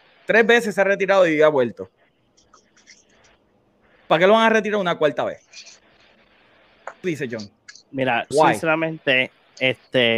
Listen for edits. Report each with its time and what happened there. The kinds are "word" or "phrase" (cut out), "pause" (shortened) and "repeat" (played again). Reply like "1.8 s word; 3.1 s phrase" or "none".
7.0 s word; 8.3 s word